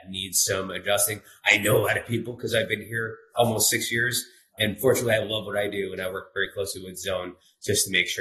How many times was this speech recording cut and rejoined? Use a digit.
0